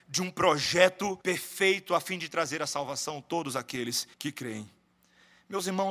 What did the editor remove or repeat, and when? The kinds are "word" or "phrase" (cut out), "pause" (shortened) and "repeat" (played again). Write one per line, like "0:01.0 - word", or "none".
0:01.2 - pause
0:04.1 - pause